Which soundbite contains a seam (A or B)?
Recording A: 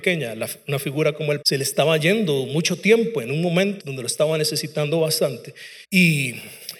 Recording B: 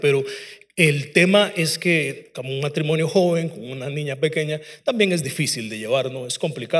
A